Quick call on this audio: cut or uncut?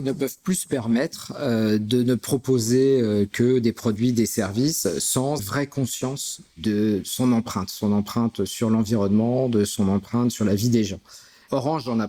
cut